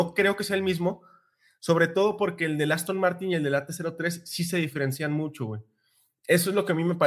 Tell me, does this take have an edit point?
no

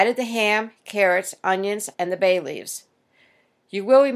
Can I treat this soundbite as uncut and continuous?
no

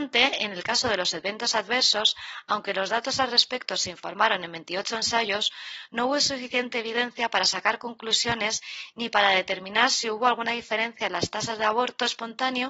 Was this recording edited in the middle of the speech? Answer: no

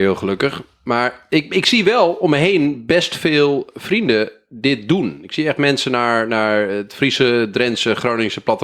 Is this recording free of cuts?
yes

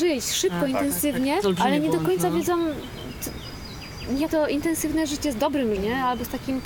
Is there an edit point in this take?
yes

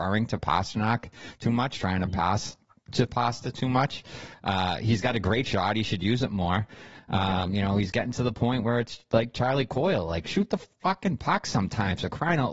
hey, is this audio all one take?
yes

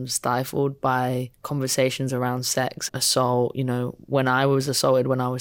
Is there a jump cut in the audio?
yes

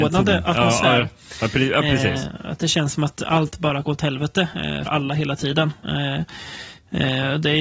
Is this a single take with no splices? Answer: no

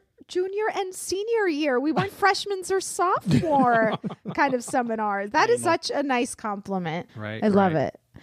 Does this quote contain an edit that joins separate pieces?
yes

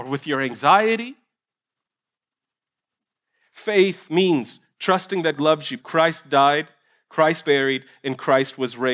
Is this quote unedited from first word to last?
no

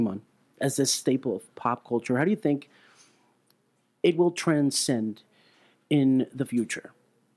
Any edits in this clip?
no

